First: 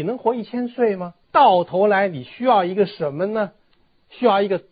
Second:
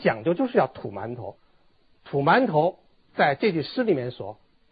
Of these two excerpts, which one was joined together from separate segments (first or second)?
first